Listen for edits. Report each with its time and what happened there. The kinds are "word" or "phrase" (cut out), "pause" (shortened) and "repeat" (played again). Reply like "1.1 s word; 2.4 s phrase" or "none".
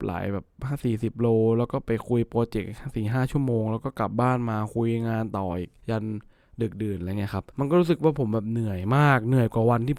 5.8 s pause; 7.5 s pause